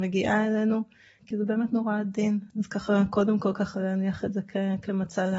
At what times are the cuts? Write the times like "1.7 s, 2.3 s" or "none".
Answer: none